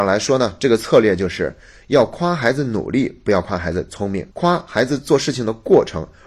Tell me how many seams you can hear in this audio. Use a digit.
1